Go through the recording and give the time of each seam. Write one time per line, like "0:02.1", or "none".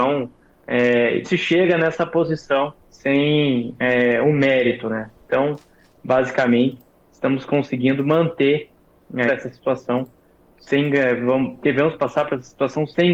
0:01.2
0:02.8
0:09.3